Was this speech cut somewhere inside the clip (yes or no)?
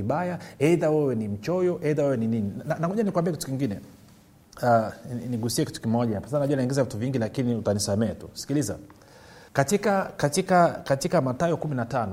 yes